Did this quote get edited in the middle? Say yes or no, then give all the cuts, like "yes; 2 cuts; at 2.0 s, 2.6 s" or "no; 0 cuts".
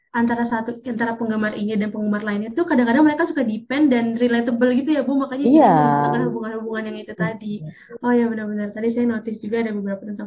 no; 0 cuts